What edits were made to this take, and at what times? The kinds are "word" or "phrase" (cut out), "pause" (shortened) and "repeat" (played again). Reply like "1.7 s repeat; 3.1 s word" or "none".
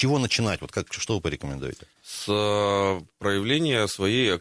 2.0 s pause